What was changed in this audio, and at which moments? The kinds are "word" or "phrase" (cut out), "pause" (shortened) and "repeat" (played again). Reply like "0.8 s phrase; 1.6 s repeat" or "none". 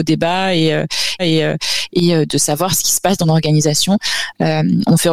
1.2 s repeat; 3.2 s word